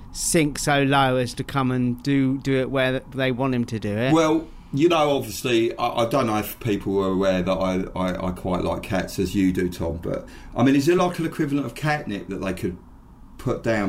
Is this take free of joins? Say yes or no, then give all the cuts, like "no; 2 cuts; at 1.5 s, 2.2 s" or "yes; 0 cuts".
yes; 0 cuts